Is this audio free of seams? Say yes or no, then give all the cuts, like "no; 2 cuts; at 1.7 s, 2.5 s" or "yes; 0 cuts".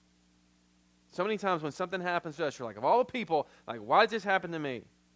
yes; 0 cuts